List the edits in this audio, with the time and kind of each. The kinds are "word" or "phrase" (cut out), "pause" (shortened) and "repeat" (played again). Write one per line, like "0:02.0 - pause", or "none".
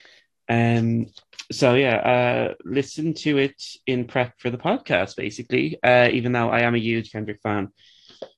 none